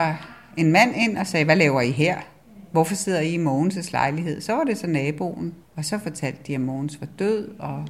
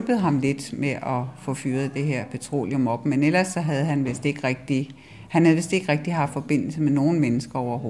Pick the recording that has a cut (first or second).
first